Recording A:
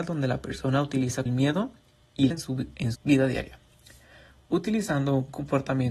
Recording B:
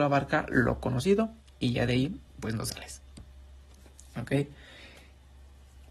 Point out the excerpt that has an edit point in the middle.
A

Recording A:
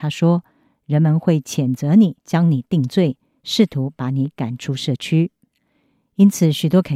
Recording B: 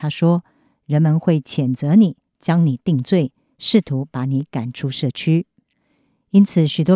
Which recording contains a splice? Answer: A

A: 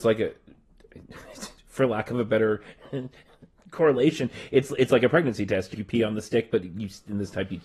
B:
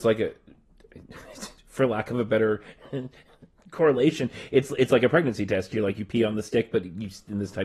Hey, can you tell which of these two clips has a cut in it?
A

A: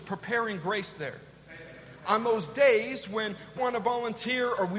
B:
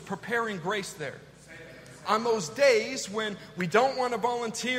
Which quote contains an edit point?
A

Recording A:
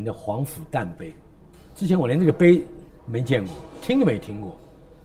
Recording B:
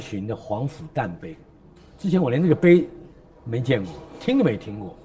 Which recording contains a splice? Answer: A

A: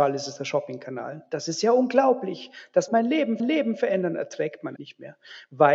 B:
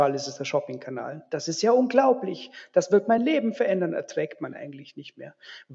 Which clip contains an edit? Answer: A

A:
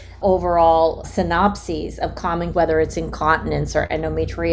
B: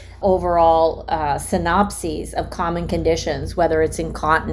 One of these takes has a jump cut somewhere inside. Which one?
A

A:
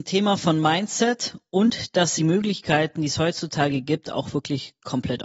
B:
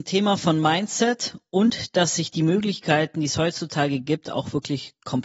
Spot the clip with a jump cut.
A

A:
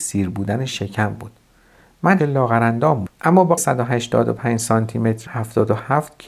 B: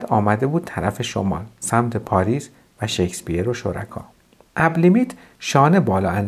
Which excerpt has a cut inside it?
A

